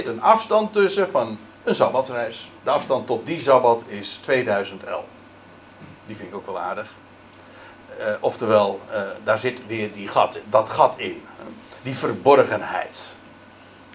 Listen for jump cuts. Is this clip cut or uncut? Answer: cut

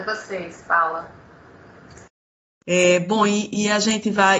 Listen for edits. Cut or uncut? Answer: uncut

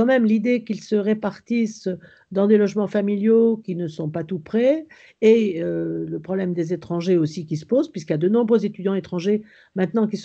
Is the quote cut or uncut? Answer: uncut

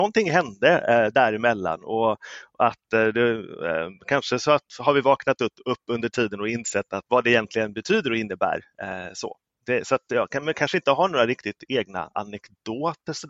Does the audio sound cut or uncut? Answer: cut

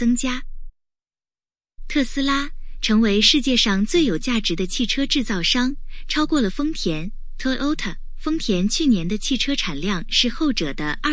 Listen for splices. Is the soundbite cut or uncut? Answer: cut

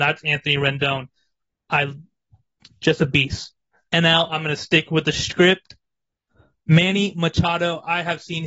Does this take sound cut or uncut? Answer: uncut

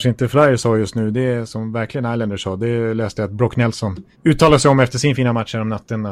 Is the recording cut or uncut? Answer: cut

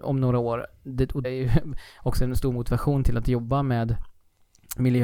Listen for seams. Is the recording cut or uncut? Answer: cut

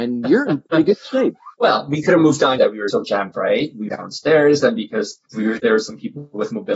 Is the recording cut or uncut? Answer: cut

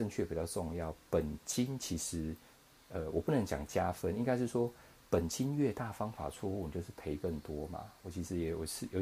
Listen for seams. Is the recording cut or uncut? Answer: uncut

